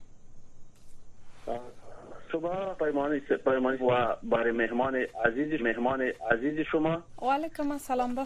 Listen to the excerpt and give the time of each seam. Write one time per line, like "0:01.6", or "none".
0:02.8
0:03.8
0:05.6